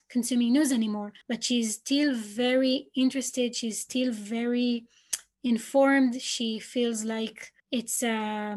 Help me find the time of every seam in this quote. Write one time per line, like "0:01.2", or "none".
0:01.2
0:07.6